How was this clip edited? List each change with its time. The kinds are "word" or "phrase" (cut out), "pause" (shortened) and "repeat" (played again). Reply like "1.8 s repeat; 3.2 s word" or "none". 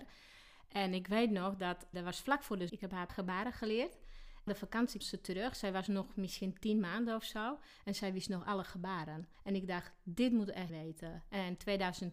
1.9 s word; 2.7 s word; 3.1 s word; 4.5 s word; 5.0 s word; 9.3 s pause; 10.7 s word